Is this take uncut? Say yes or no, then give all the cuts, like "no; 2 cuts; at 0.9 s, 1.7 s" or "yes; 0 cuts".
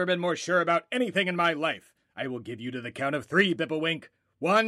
yes; 0 cuts